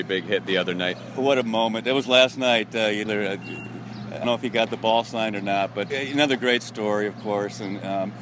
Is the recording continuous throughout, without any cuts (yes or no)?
no